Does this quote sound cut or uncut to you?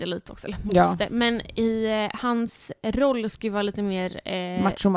uncut